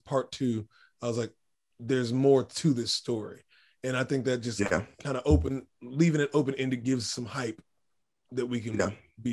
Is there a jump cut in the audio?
no; 0 cuts

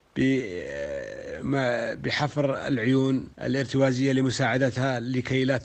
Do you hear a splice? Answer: yes; 1 cut; at 3.3 s

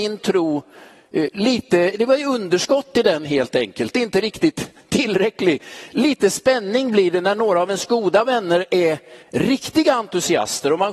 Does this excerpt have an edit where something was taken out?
yes; 1 cut; at 9.2 s

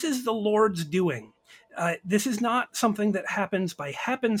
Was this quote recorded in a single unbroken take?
yes; 0 cuts

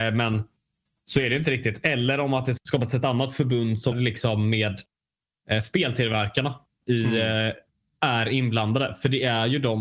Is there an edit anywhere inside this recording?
yes; 2 cuts; at 2.6 s, 3.9 s

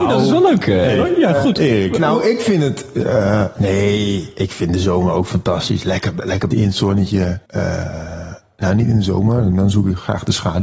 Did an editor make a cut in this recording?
yes; 2 cuts; at 6.5 s, 7.5 s

